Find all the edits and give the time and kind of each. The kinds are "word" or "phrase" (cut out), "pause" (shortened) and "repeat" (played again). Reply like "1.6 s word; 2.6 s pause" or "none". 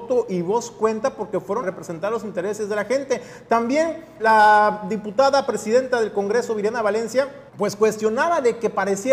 1.6 s phrase; 4.2 s word; 7.5 s pause